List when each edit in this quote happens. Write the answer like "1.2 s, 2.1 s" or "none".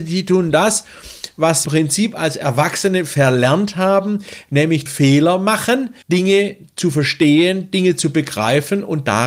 1.6 s, 4.9 s, 6.0 s